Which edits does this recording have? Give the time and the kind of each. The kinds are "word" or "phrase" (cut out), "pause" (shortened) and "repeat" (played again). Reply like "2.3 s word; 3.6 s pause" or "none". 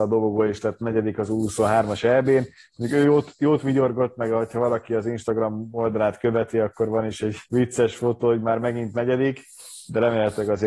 7.5 s pause